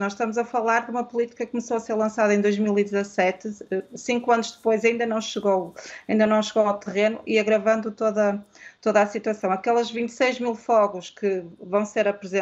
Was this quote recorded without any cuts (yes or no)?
yes